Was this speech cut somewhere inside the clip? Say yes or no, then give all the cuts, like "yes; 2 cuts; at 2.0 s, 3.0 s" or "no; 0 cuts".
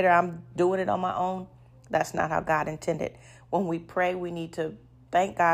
no; 0 cuts